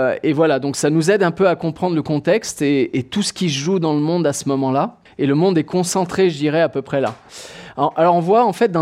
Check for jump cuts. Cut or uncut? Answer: cut